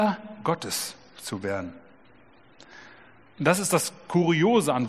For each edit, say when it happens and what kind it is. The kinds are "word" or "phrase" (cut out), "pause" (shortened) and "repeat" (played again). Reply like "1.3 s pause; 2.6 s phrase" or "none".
none